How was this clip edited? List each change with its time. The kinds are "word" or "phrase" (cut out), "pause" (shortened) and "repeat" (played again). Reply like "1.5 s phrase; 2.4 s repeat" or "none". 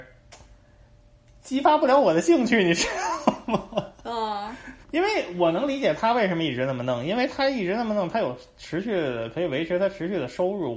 4.8 s pause